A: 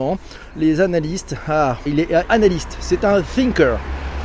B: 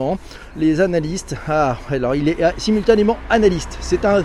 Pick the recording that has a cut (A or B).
A